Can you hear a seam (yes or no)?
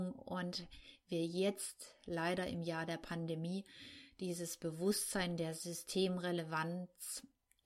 no